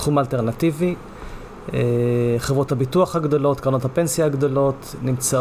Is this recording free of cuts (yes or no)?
yes